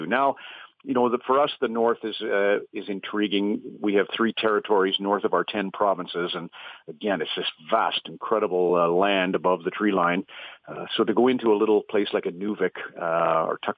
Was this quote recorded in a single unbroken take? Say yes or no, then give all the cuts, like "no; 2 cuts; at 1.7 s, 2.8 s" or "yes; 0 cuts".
yes; 0 cuts